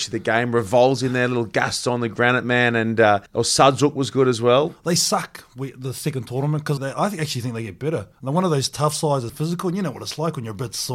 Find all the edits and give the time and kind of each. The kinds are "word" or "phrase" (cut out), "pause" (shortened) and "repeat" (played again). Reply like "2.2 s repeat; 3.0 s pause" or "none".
3.3 s pause; 6.8 s word; 8.1 s pause; 9.3 s word